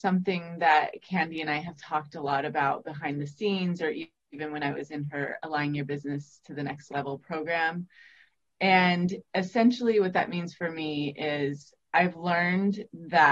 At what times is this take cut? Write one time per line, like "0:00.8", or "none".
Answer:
none